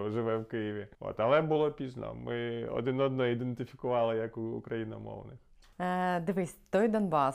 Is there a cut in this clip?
yes; 2 cuts; at 0.9 s, 5.6 s

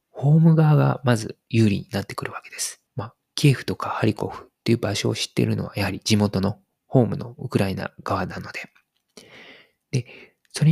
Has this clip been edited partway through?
yes; 1 cut; at 2.9 s

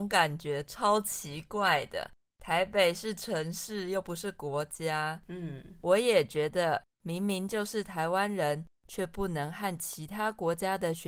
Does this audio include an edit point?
no; 0 cuts

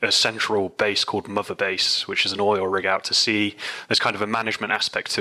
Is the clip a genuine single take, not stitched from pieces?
yes; 0 cuts

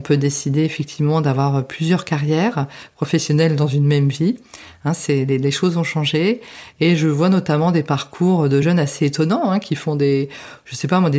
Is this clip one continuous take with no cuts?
yes; 0 cuts

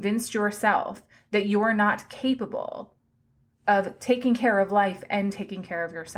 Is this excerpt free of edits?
yes; 0 cuts

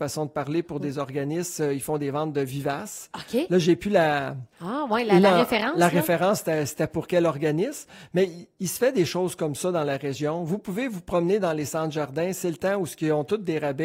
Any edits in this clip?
yes; 1 cut; at 4.5 s

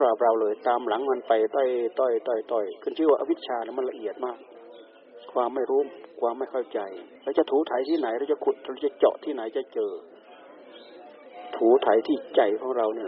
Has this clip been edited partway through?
yes; 1 cut; at 7.2 s

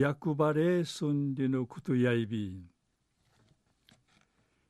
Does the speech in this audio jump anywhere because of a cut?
no; 0 cuts

